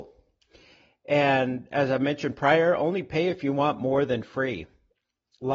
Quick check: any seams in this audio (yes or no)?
no